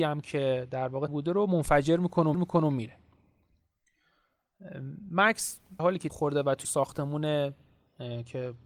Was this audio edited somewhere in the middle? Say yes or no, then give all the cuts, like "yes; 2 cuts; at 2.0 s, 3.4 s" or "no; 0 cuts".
yes; 5 cuts; at 1.1 s, 2.3 s, 5.8 s, 6.1 s, 6.6 s